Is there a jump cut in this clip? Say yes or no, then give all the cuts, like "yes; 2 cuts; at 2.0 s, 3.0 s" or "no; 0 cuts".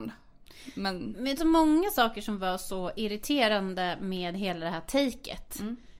yes; 1 cut; at 1.4 s